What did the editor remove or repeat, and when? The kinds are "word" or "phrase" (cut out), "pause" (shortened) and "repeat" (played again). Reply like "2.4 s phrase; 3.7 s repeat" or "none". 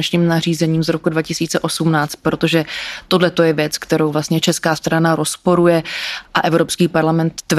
none